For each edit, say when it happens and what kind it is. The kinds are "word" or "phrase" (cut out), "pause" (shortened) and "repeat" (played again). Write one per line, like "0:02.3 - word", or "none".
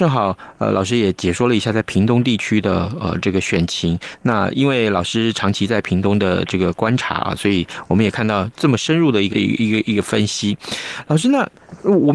0:09.3 - word